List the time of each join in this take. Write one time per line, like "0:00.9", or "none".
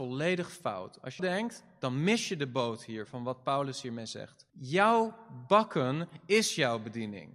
0:01.2
0:04.5